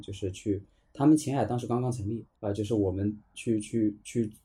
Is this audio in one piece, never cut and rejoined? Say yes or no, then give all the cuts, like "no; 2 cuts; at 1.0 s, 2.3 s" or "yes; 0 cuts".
no; 1 cut; at 2.4 s